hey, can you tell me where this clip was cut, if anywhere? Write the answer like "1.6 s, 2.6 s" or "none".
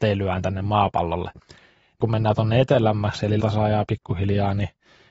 2.0 s, 3.4 s